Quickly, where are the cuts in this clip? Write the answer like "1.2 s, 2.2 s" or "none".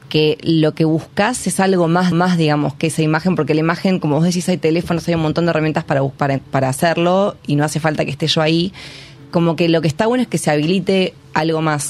2.1 s